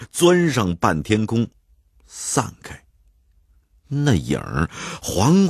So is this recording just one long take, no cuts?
yes; 0 cuts

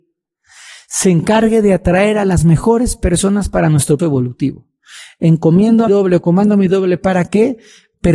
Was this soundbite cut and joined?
yes; 2 cuts; at 4.0 s, 5.9 s

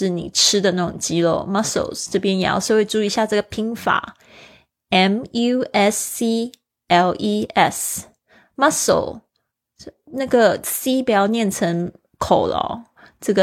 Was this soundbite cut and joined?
no; 0 cuts

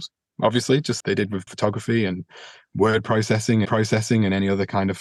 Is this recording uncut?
no; 3 cuts; at 1.0 s, 1.5 s, 3.7 s

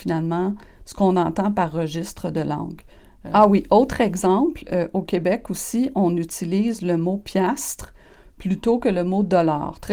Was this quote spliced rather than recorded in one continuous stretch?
no; 0 cuts

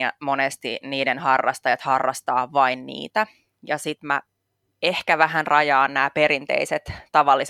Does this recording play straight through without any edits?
yes; 0 cuts

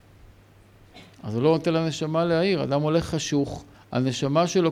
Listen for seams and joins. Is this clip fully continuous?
no; 1 cut; at 3.7 s

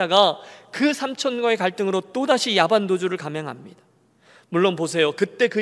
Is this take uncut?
yes; 0 cuts

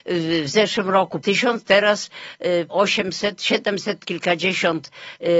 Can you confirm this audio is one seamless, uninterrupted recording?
no; 2 cuts; at 1.2 s, 2.7 s

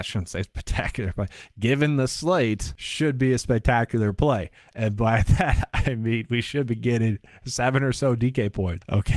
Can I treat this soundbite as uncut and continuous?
yes; 0 cuts

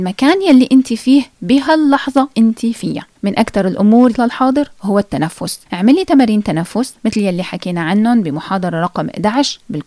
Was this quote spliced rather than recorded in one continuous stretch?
yes; 4 cuts; at 2.3 s, 3.2 s, 4.1 s, 5.7 s

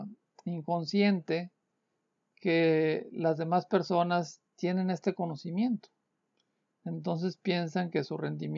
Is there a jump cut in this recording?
no; 0 cuts

